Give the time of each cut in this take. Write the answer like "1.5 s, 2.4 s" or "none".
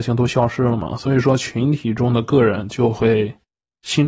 none